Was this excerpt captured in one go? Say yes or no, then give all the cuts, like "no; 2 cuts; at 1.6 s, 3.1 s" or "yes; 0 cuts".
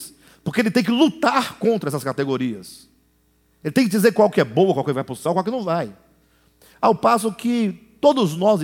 yes; 0 cuts